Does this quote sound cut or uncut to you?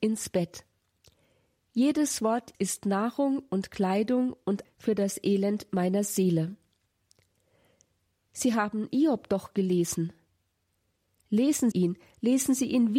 cut